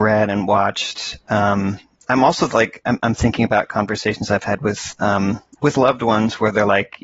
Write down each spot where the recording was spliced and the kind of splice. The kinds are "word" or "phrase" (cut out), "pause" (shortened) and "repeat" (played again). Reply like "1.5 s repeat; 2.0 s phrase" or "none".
none